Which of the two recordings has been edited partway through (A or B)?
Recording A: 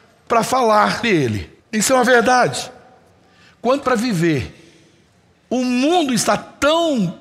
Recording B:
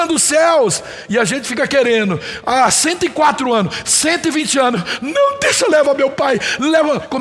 A